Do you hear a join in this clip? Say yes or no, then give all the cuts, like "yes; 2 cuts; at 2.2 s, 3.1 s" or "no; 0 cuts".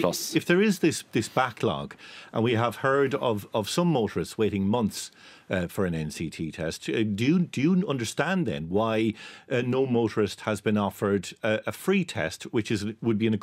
no; 0 cuts